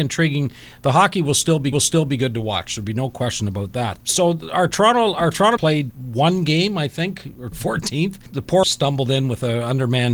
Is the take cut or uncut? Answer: cut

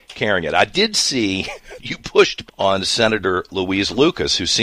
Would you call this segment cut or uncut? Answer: cut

